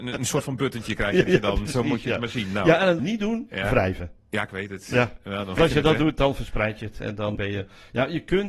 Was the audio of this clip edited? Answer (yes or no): yes